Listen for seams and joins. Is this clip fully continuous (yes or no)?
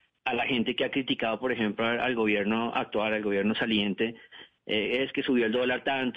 yes